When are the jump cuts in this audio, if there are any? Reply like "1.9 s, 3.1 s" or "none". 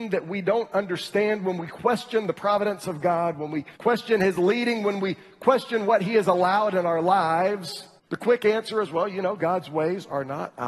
3.7 s, 8.0 s